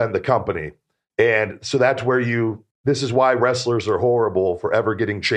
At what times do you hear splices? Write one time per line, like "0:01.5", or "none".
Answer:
0:02.7